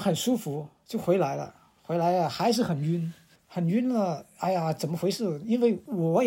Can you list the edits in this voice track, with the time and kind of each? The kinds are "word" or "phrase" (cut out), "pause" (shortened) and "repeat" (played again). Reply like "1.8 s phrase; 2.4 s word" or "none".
none